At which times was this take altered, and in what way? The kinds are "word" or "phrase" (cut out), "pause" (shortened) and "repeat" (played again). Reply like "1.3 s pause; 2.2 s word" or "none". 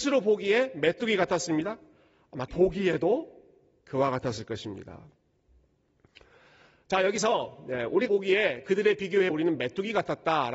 2.5 s word; 8.1 s word; 9.3 s word